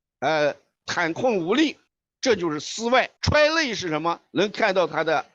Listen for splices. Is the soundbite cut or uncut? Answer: cut